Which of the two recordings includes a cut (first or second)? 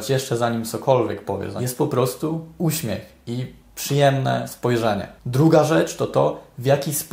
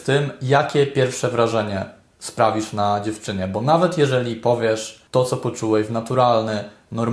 second